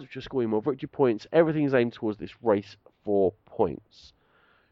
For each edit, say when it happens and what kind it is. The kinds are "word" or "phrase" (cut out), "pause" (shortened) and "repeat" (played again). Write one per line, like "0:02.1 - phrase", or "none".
0:01.3 - word